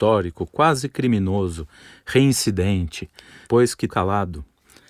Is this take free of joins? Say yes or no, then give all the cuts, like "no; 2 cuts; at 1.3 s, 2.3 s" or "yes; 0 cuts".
no; 2 cuts; at 3.5 s, 3.9 s